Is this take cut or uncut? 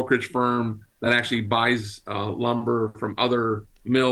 uncut